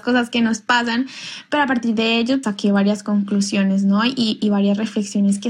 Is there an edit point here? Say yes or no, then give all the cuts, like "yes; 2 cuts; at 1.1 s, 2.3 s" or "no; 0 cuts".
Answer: yes; 1 cut; at 2.4 s